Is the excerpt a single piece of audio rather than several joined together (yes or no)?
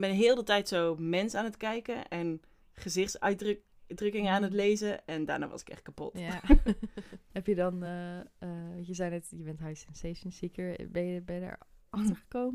yes